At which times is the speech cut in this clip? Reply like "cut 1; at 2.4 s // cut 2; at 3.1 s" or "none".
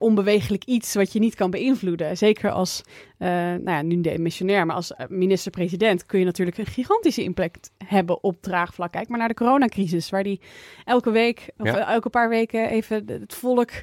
none